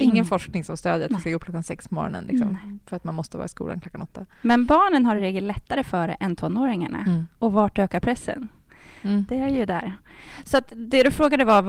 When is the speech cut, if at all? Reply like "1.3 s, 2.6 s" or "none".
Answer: none